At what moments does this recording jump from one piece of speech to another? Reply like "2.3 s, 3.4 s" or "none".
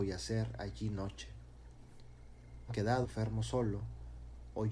2.7 s, 3.0 s

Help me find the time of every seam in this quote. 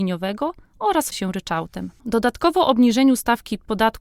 1.1 s

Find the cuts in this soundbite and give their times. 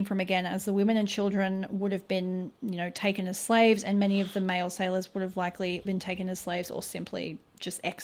5.8 s

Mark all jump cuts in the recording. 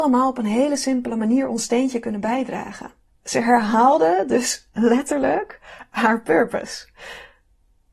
3.0 s

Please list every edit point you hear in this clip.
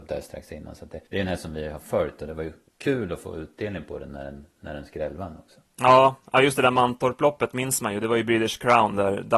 1.1 s

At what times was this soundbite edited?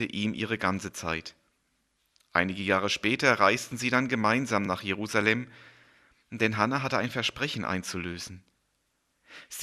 none

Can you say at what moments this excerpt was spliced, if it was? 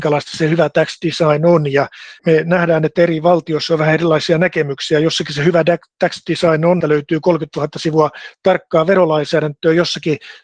2.2 s, 6.8 s

